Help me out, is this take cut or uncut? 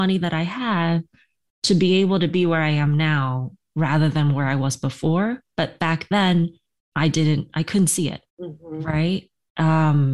cut